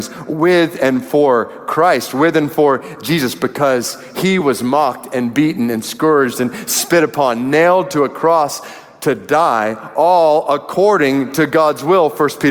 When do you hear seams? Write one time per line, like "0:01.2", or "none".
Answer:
none